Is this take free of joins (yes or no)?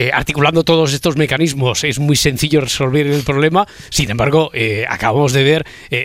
yes